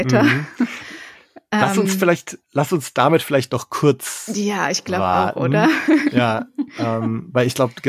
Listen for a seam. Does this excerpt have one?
yes; 1 cut; at 2.4 s

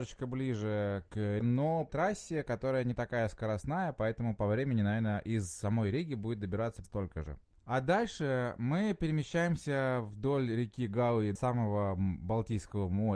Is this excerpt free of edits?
no; 4 cuts; at 1.4 s, 1.9 s, 6.8 s, 11.4 s

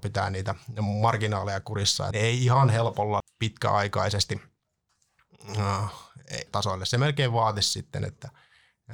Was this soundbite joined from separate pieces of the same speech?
yes; 3 cuts; at 2.1 s, 3.2 s, 6.5 s

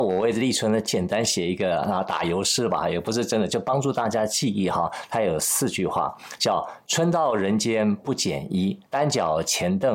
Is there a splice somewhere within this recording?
yes; 1 cut; at 8.9 s

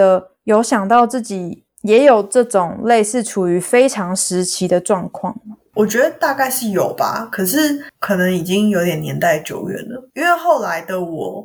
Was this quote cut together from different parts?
yes; 1 cut; at 10.1 s

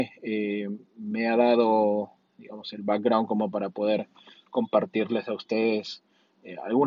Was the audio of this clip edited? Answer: no; 0 cuts

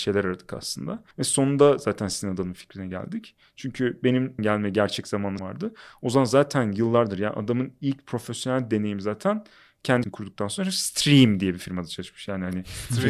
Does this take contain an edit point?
yes; 4 cuts; at 1.1 s, 4.4 s, 5.4 s, 10.0 s

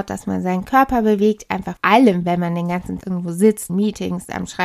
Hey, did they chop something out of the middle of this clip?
yes; 3 cuts; at 1.8 s, 3.0 s, 3.7 s

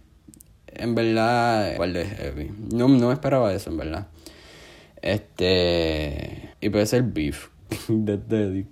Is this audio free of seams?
no; 2 cuts; at 1.8 s, 6.5 s

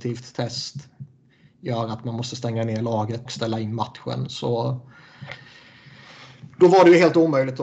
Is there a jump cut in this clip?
yes; 1 cut; at 3.3 s

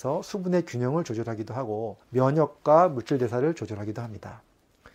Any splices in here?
yes; 1 cut; at 2.0 s

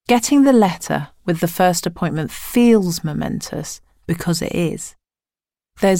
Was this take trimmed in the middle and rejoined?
no; 0 cuts

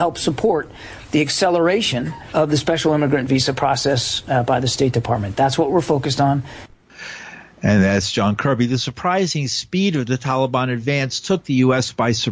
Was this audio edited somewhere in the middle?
no; 0 cuts

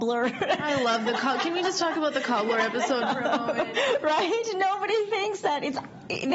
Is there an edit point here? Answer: no; 0 cuts

